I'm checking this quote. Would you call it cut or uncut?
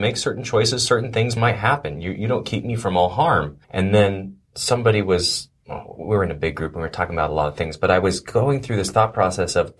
cut